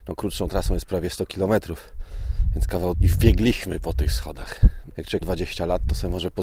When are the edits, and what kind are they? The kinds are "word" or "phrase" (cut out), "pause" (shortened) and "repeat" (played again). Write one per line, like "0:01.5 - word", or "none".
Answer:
0:02.9 - word
0:04.9 - word
0:05.2 - word